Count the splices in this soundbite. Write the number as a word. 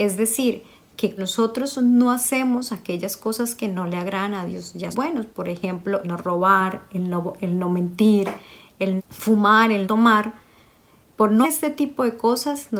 six